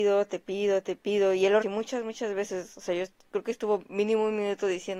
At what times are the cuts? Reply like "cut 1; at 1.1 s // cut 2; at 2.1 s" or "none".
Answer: cut 1; at 1.6 s

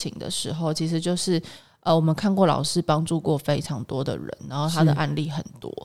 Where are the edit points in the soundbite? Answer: none

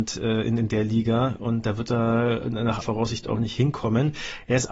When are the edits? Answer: cut 1; at 1.6 s // cut 2; at 2.8 s

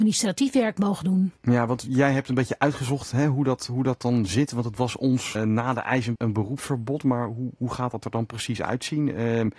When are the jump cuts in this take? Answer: cut 1; at 1.4 s // cut 2; at 5.3 s // cut 3; at 6.1 s

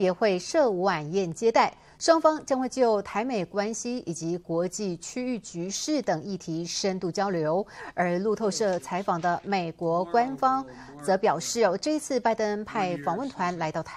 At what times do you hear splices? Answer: none

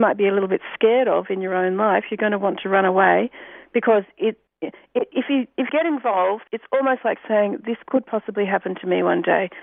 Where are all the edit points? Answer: cut 1; at 4.5 s // cut 2; at 5.7 s // cut 3; at 6.5 s

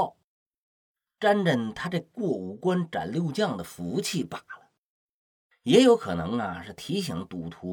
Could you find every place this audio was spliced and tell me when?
none

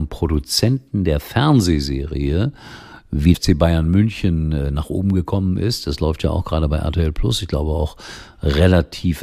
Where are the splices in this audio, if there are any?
cut 1; at 3.3 s

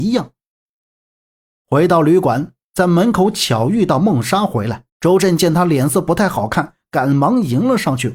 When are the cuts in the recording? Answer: cut 1; at 4.9 s

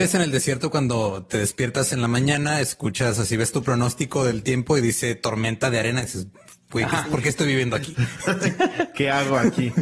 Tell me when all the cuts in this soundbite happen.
none

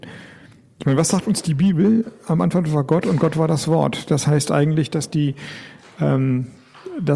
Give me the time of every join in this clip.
none

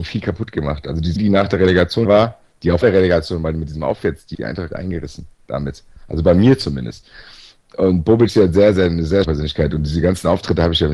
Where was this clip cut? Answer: cut 1; at 1.2 s // cut 2; at 2.0 s // cut 3; at 2.8 s // cut 4; at 4.3 s // cut 5; at 4.7 s // cut 6; at 8.3 s // cut 7; at 9.2 s

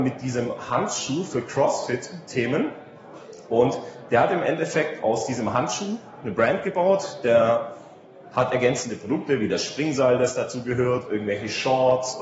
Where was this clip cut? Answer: none

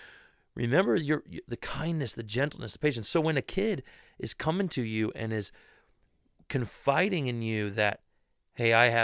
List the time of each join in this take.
none

